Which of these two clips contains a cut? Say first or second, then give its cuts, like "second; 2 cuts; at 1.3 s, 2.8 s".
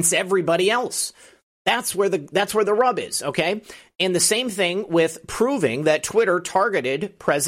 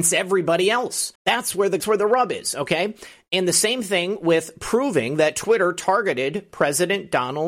second; 2 cuts; at 1.2 s, 1.8 s